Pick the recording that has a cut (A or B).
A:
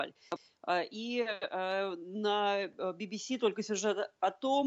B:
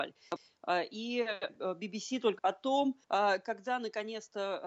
B